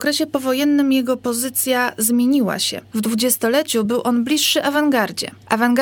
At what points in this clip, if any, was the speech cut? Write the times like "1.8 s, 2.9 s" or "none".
none